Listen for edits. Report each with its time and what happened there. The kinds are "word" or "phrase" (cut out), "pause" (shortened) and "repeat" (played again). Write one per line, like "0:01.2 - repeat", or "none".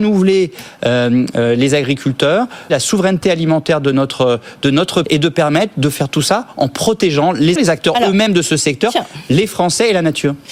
0:02.7 - word
0:05.0 - word
0:07.6 - word